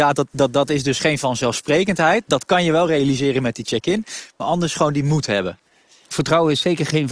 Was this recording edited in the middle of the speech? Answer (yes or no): no